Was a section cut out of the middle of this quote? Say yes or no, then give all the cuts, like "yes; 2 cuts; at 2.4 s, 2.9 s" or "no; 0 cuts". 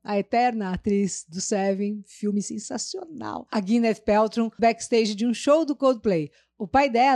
yes; 1 cut; at 4.6 s